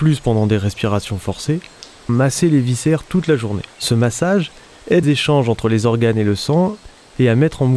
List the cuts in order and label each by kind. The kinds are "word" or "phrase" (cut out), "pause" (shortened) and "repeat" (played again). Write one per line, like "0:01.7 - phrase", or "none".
0:02.1 - word
0:03.7 - pause
0:05.0 - word

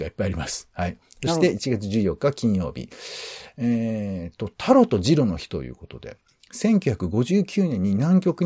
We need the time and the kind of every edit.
none

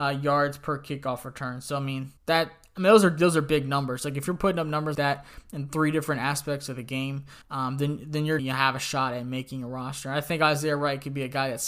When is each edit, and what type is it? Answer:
0:02.2 - pause
0:04.9 - word
0:07.4 - pause
0:08.4 - word

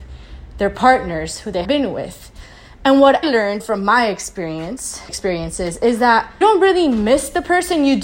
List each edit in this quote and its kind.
0:01.6 - word
0:03.2 - word
0:03.6 - word
0:05.1 - word
0:06.4 - word

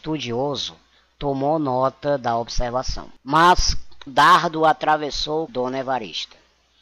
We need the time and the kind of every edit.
0:04.1 - word
0:05.5 - phrase

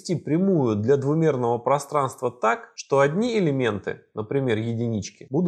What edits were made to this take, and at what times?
none

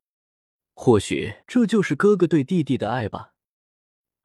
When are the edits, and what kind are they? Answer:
0:01.4 - pause

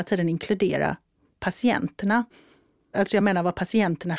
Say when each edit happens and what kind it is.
none

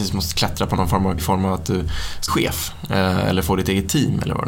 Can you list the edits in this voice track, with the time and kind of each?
0:01.2 - word
0:02.3 - word

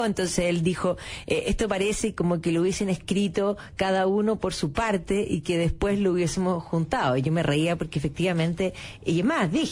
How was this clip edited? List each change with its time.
none

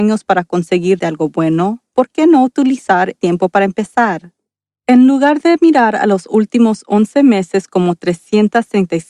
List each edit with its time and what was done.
0:01.0 - word
0:03.1 - word

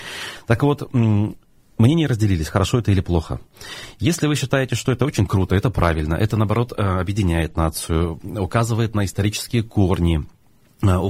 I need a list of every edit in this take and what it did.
none

